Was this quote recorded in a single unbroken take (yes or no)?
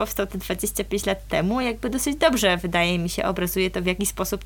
yes